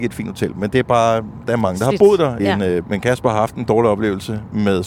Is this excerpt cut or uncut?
cut